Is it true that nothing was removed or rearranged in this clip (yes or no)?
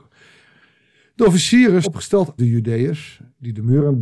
no